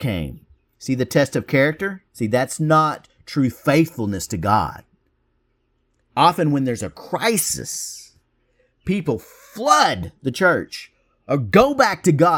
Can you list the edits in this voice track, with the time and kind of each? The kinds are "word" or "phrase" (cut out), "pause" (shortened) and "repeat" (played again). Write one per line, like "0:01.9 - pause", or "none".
0:02.1 - pause